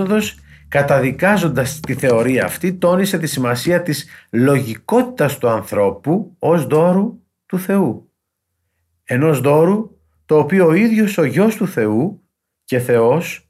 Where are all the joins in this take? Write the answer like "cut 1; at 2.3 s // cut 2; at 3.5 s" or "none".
none